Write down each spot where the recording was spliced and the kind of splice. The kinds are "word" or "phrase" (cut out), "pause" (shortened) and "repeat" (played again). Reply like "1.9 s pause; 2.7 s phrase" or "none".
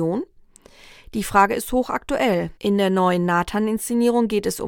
2.6 s pause